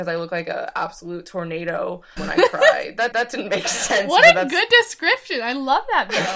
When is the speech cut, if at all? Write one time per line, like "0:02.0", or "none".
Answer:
0:02.2
0:03.1